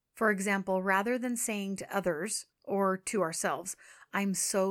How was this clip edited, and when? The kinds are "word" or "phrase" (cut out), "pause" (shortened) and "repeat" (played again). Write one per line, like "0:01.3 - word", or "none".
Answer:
0:02.5 - pause